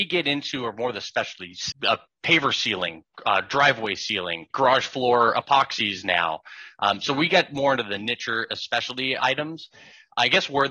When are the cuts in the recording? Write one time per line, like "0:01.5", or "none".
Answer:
0:01.7
0:04.5
0:09.2